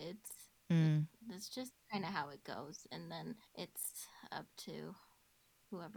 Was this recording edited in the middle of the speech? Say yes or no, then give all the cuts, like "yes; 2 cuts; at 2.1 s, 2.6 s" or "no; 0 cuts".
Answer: yes; 1 cut; at 3.5 s